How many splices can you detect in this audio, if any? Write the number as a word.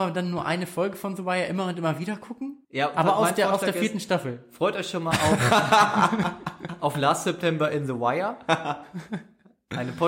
one